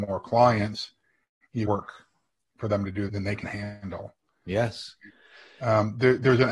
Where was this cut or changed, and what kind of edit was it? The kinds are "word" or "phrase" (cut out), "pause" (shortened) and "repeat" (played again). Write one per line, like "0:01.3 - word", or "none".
0:01.7 - phrase
0:03.1 - word
0:03.4 - word